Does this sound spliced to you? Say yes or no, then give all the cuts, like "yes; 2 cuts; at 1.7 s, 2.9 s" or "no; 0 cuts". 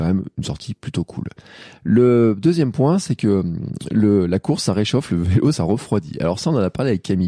no; 0 cuts